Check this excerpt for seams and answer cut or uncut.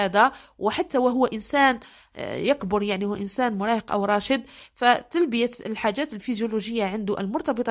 uncut